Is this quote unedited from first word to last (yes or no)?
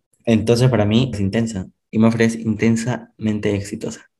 no